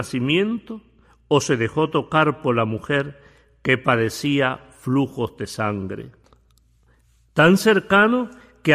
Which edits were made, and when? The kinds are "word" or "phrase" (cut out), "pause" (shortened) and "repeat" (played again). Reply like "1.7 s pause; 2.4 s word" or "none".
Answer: none

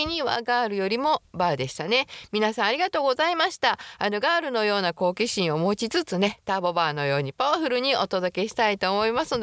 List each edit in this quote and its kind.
none

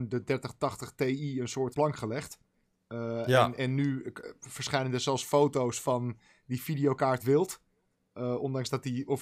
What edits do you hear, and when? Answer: 1.7 s phrase; 7.2 s phrase

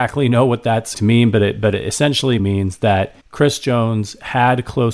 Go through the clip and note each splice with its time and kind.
0.9 s word; 2.4 s word; 3.2 s pause

